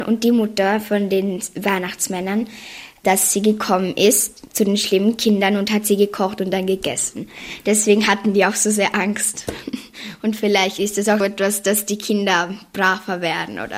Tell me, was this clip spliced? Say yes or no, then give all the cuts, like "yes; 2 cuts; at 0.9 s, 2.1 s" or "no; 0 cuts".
yes; 1 cut; at 11.2 s